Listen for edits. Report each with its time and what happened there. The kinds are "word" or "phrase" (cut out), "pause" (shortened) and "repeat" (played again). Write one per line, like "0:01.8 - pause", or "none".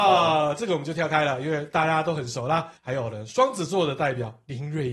0:02.8 - pause